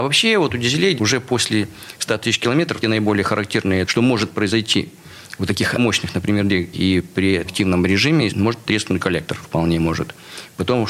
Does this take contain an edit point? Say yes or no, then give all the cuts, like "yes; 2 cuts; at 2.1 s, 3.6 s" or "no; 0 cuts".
yes; 9 cuts; at 1.0 s, 2.8 s, 3.8 s, 5.8 s, 6.7 s, 7.4 s, 8.3 s, 9.0 s, 9.4 s